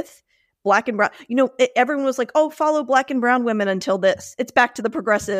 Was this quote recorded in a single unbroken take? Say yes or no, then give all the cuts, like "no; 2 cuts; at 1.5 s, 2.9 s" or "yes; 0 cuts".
yes; 0 cuts